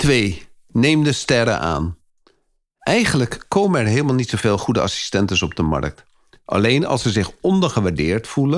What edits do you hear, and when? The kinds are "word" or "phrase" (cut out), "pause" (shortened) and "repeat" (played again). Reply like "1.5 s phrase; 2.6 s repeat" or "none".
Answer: none